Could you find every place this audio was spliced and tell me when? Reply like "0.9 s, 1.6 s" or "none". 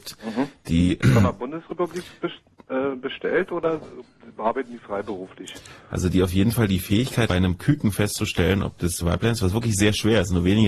1.0 s, 7.3 s, 9.0 s